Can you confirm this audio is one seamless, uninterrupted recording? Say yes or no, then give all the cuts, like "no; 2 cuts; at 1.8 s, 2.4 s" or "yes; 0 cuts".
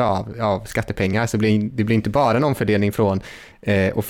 yes; 0 cuts